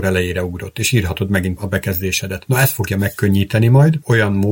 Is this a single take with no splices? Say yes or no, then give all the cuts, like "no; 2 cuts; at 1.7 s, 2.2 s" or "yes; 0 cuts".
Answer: no; 1 cut; at 1.6 s